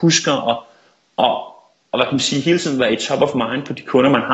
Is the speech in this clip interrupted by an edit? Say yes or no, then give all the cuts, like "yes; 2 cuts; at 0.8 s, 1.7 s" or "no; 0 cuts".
no; 0 cuts